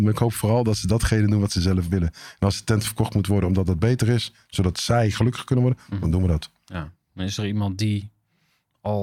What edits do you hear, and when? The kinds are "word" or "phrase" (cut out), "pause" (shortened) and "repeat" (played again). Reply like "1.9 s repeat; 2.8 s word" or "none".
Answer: none